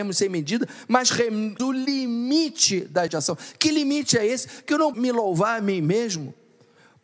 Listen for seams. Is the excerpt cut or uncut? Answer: cut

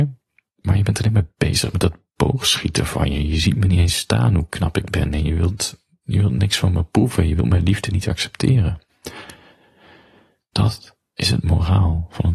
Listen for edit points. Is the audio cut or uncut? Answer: uncut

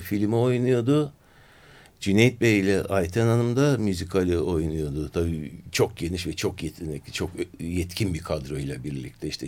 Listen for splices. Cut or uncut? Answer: uncut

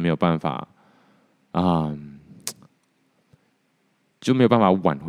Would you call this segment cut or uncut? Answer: uncut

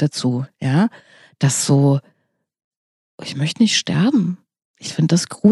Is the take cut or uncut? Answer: uncut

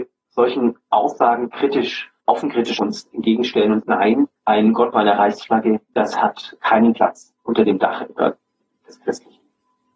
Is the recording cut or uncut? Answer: cut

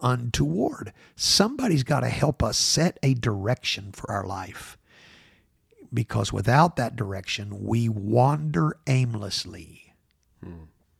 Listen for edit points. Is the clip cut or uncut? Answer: uncut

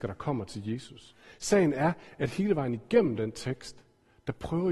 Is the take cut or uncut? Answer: uncut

